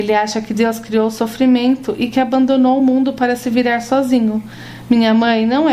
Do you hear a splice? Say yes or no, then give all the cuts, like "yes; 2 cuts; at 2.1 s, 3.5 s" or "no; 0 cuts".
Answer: no; 0 cuts